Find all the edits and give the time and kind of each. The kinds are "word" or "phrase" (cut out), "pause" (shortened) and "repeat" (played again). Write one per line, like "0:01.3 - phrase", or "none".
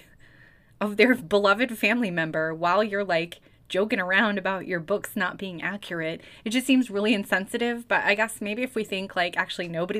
none